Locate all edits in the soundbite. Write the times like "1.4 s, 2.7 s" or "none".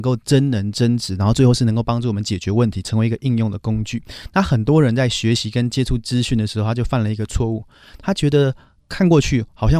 none